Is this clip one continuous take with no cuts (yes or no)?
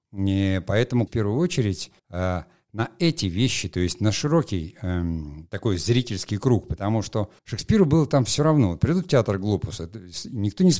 no